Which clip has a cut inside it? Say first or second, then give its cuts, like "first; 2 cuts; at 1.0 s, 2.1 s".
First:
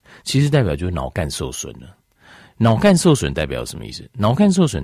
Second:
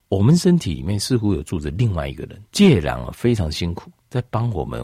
second; 1 cut; at 2.5 s